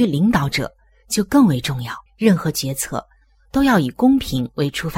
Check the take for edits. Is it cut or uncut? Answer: cut